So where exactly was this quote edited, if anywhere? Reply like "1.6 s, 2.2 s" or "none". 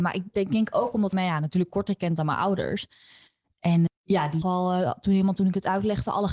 1.1 s, 3.9 s, 4.4 s